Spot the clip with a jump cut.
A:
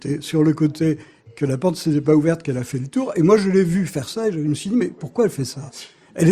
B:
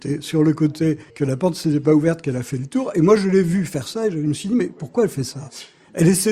B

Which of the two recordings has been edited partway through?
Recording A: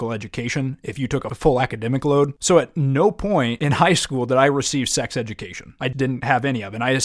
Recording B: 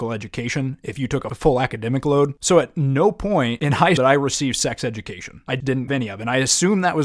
B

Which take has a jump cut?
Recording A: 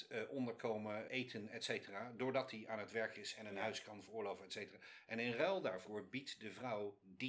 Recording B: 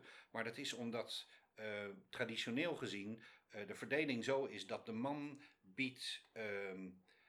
A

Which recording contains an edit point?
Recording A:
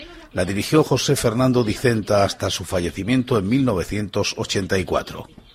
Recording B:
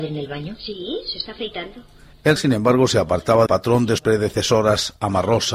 B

